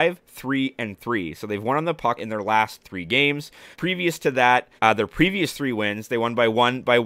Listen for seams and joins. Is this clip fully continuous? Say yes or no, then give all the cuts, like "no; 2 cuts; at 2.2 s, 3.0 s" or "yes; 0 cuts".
no; 3 cuts; at 2.2 s, 3.7 s, 4.8 s